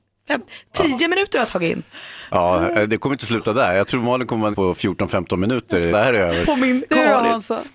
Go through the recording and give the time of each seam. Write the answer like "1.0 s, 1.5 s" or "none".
4.5 s, 5.9 s